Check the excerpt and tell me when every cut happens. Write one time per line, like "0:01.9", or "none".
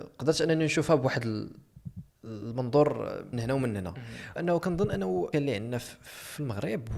0:03.3
0:04.4
0:05.3

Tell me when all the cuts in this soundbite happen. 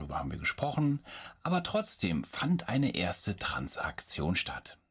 none

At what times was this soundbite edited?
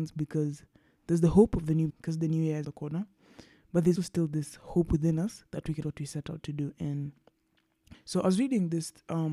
0:01.9
0:02.6
0:04.0
0:05.8
0:07.9

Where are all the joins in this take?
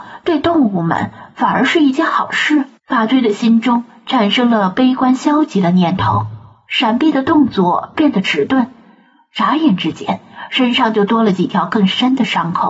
0:02.8

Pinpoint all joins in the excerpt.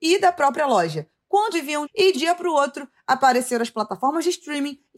0:01.5
0:01.8
0:02.1

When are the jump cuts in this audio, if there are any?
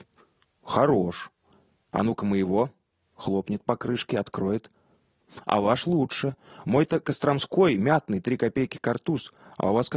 none

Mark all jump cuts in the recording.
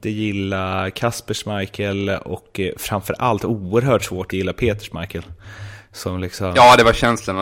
0:04.3

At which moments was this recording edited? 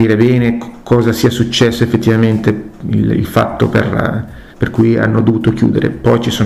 0:04.5

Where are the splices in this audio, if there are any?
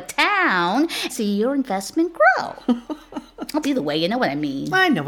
0:01.1
0:03.6

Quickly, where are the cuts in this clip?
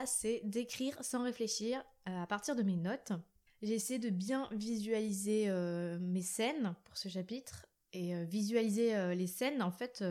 none

